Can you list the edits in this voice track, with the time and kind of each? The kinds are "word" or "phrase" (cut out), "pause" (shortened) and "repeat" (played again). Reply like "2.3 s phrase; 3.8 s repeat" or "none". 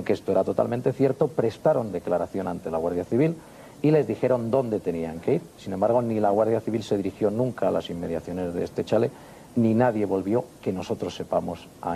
none